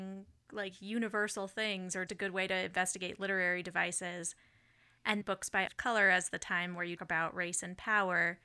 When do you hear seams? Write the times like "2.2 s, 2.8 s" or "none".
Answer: 2.1 s, 5.2 s, 5.7 s, 7.0 s